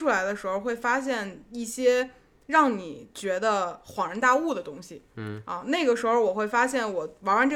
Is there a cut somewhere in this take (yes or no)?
no